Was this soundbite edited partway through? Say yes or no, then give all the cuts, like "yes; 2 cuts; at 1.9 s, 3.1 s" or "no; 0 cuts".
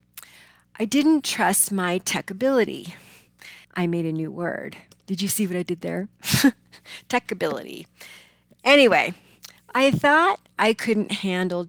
yes; 1 cut; at 3.6 s